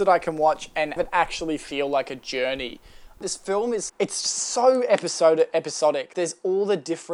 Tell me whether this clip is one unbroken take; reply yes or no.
no